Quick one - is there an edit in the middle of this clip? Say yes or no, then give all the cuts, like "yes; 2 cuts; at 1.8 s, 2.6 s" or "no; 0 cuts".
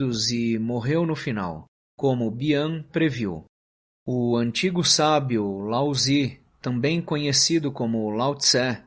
no; 0 cuts